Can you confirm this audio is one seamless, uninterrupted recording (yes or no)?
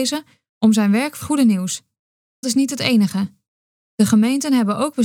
no